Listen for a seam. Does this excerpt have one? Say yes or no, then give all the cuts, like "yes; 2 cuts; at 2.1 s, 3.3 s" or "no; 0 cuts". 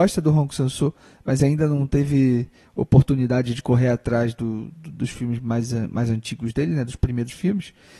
no; 0 cuts